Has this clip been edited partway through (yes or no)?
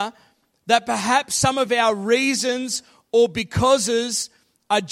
no